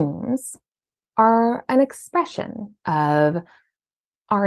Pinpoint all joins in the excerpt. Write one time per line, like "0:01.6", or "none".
0:02.8